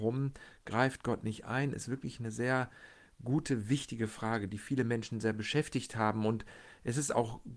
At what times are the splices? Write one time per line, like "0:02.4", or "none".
none